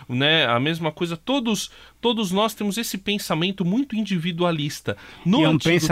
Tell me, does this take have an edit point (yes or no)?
no